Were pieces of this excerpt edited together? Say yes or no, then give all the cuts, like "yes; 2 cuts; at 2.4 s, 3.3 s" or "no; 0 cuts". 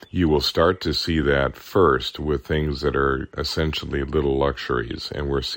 no; 0 cuts